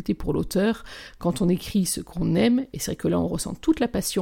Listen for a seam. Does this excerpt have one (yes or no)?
no